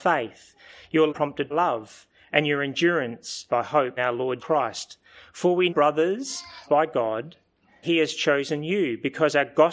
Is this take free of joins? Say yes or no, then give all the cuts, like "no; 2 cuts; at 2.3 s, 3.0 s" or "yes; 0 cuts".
no; 8 cuts; at 1.1 s, 1.5 s, 3.5 s, 4.0 s, 4.4 s, 5.7 s, 6.7 s, 7.8 s